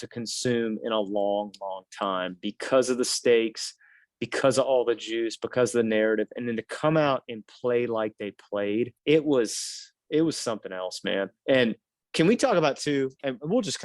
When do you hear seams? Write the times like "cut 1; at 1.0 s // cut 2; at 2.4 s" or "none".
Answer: cut 1; at 9.0 s